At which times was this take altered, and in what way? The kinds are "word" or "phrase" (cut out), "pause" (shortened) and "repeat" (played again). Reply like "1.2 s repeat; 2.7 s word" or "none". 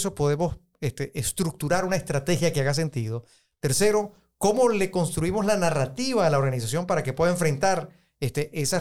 none

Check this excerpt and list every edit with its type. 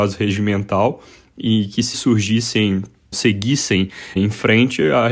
1.9 s word; 3.1 s word; 4.2 s word

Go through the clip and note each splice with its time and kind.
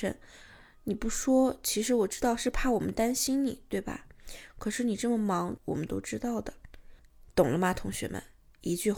5.6 s phrase

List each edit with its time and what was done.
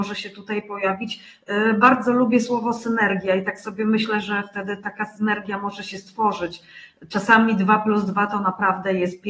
none

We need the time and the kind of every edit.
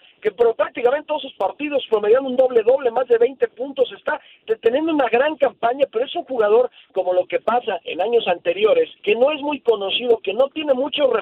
7.8 s pause; 9.0 s pause

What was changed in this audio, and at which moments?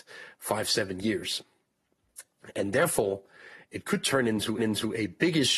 4.6 s repeat

